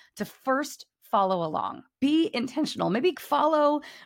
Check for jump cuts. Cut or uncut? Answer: cut